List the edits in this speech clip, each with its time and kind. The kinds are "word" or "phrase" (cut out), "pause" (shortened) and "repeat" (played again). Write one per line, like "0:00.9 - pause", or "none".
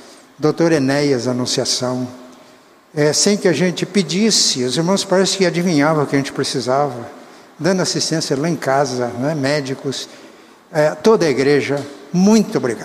none